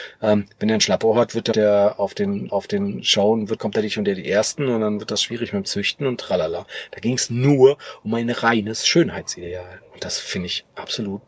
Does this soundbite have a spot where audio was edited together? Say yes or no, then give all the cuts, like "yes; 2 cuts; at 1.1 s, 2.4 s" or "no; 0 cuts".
yes; 3 cuts; at 1.5 s, 2.5 s, 3.6 s